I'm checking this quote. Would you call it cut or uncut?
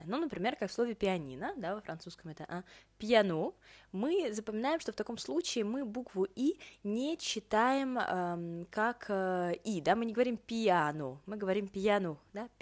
uncut